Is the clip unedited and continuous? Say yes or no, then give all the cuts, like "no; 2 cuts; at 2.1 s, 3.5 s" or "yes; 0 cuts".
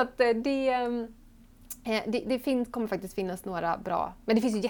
yes; 0 cuts